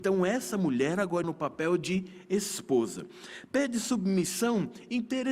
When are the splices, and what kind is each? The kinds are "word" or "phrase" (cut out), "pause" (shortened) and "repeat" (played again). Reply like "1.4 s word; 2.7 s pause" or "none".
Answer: 1.2 s word